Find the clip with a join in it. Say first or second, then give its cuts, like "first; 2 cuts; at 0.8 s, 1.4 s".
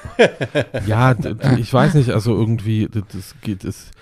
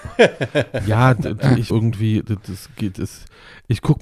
second; 1 cut; at 1.7 s